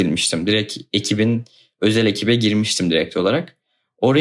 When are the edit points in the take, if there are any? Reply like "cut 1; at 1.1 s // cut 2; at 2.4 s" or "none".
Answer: none